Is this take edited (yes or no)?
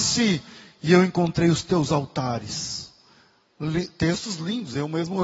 no